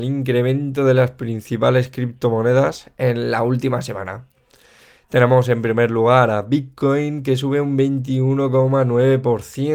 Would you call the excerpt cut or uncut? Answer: uncut